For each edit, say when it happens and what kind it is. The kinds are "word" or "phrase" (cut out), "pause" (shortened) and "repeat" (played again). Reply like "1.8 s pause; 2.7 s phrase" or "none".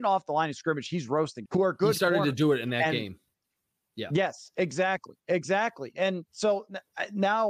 1.5 s word